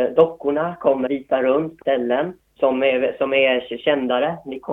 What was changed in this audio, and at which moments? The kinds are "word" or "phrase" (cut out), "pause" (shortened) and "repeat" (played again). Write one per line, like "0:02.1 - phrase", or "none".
0:01.1 - phrase
0:01.8 - word
0:02.4 - pause

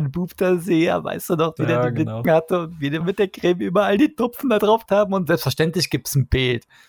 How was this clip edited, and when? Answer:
0:01.6 - word
0:02.2 - word
0:03.0 - word
0:04.9 - word

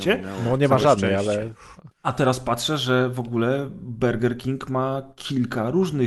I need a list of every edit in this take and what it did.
0:01.9 - pause

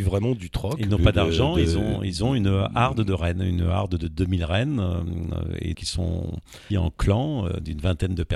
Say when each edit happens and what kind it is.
0:05.7 - word
0:06.7 - word

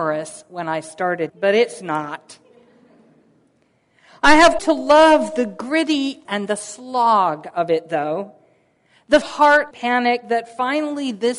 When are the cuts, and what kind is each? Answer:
0:01.3 - word
0:04.6 - word
0:06.2 - word
0:09.2 - word
0:09.7 - word

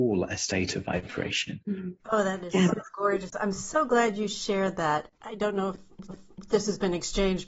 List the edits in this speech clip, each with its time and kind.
0:02.0 - pause
0:05.1 - pause
0:06.1 - repeat

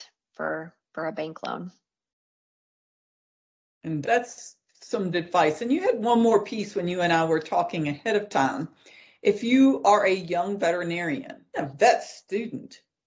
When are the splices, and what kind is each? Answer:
0:04.0 - word
0:05.1 - word
0:11.5 - word

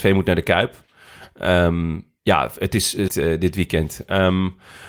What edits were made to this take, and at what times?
0:02.2 - pause
0:03.1 - phrase

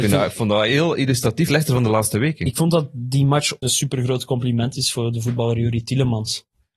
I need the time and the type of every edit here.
0:01.5 - phrase
0:03.6 - word

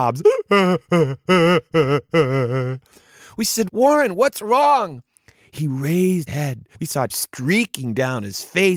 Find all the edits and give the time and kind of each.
0:03.7 - word
0:06.3 - word
0:06.7 - pause
0:07.1 - word

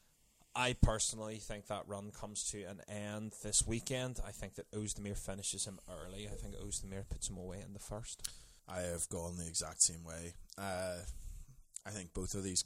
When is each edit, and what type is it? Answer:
0:08.6 - pause

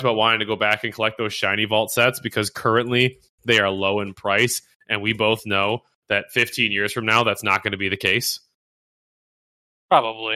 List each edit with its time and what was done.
none

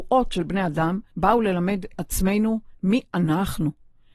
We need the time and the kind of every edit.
0:01.1 - pause
0:01.9 - word

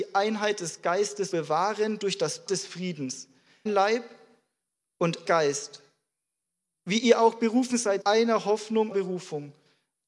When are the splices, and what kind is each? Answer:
0:01.3 - word
0:02.5 - word
0:03.7 - word
0:05.3 - word
0:08.0 - word
0:08.9 - word

